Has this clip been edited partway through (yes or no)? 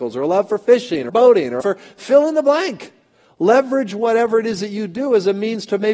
yes